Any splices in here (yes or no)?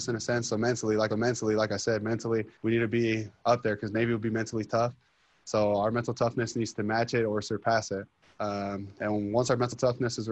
yes